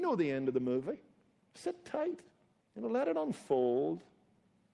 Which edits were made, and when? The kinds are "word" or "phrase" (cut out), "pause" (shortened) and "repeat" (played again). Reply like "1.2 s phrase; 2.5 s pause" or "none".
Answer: none